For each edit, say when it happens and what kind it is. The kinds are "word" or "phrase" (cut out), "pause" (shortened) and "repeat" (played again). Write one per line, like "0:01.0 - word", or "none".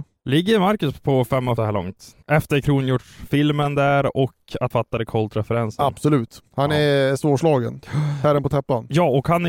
0:01.6 - phrase
0:02.2 - pause
0:04.7 - word
0:06.5 - pause